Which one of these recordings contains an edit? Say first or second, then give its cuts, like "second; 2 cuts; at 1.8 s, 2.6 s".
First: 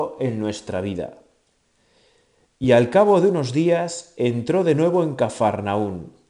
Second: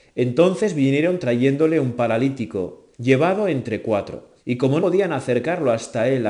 second; 3 cuts; at 2.9 s, 4.4 s, 4.8 s